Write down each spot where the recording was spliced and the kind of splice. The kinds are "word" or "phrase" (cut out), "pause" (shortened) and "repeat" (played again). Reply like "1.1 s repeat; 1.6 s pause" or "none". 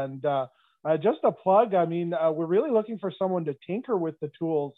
none

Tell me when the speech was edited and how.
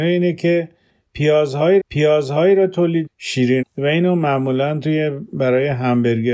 1.8 s repeat; 3.1 s phrase; 3.6 s word

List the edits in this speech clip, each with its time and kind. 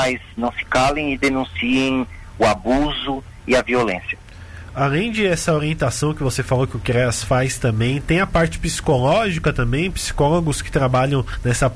none

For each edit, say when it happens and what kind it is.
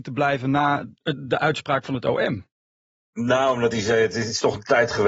none

